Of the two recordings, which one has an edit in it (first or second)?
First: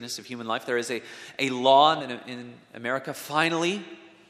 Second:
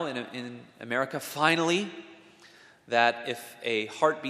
first